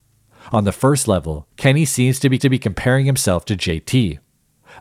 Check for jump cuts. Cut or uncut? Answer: cut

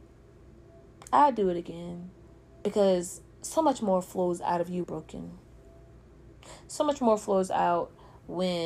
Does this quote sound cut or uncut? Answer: cut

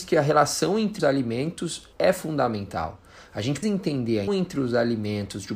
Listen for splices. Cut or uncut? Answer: cut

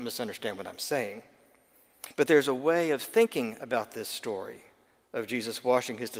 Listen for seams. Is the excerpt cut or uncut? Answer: uncut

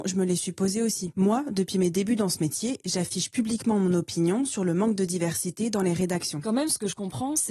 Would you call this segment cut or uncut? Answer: uncut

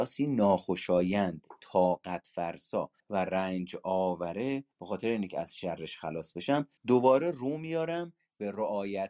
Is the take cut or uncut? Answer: cut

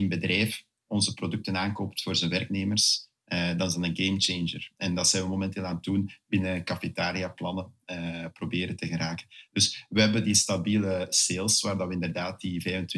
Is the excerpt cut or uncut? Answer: uncut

